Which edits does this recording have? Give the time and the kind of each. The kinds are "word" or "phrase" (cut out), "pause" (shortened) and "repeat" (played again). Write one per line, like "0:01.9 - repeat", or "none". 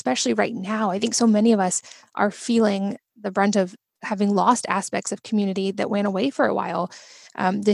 none